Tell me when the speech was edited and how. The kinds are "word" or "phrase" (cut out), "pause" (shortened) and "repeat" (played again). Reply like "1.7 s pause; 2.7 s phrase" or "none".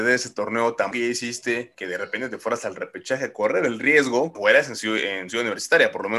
0.9 s word; 4.3 s word